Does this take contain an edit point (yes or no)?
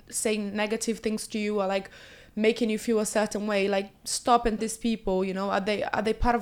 yes